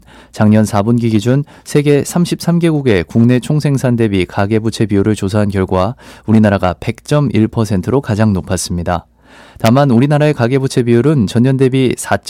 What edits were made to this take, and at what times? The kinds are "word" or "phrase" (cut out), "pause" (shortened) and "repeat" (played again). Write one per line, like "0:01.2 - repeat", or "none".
none